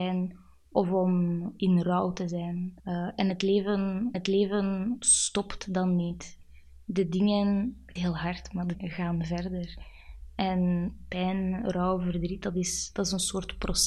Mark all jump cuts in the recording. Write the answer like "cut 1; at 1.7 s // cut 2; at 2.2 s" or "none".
cut 1; at 2.8 s // cut 2; at 4.1 s // cut 3; at 8.0 s // cut 4; at 8.7 s